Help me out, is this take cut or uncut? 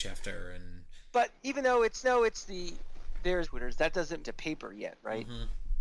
cut